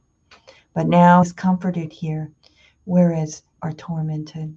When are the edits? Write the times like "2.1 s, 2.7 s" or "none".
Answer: 1.2 s, 3.6 s